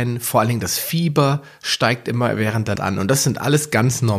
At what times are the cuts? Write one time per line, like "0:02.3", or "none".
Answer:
0:02.8